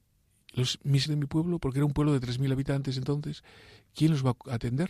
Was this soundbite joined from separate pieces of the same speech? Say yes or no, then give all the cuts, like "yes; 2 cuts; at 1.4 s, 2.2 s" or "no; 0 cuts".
yes; 1 cut; at 1.1 s